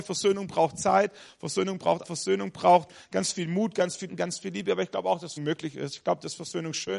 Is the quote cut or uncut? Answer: cut